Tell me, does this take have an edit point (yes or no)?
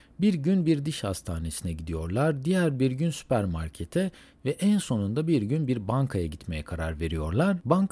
no